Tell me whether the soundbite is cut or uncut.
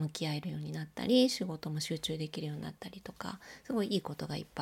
uncut